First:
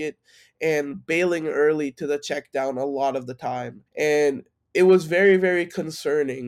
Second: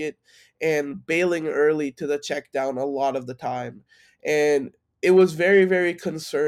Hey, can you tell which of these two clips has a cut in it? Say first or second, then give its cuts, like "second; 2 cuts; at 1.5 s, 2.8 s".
first; 1 cut; at 3.9 s